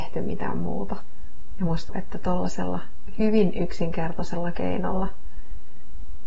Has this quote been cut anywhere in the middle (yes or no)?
yes